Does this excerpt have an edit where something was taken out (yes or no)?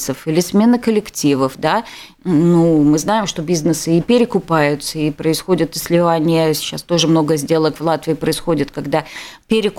no